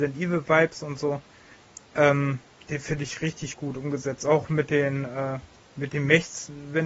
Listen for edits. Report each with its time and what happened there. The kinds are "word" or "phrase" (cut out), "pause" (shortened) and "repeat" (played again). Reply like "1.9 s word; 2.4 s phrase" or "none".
none